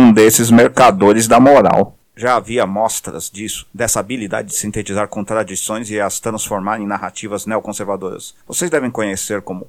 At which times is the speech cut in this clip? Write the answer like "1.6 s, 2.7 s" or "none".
8.4 s